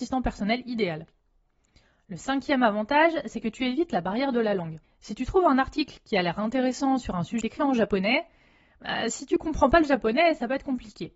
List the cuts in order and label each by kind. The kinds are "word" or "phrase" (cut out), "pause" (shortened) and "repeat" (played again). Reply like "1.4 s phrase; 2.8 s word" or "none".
4.8 s pause; 7.4 s phrase